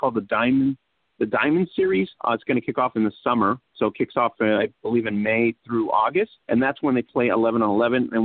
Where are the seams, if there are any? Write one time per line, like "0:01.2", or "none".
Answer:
0:02.2
0:03.7
0:06.4